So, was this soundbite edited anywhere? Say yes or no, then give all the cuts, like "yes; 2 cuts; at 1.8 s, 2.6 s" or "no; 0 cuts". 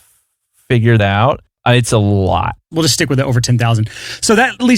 yes; 1 cut; at 1.0 s